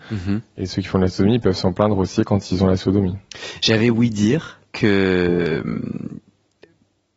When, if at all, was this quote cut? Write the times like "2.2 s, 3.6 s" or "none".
4.7 s